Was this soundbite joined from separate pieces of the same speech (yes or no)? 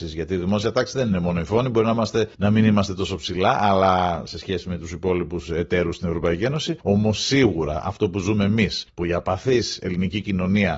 yes